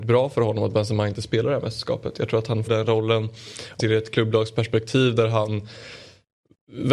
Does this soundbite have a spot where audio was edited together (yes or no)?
yes